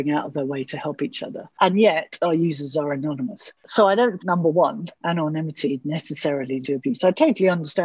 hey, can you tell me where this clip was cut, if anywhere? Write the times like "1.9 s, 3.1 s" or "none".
4.2 s, 6.6 s